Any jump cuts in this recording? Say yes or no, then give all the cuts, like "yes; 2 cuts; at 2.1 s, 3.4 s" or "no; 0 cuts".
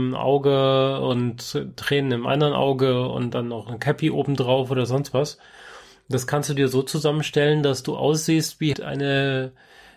yes; 1 cut; at 8.7 s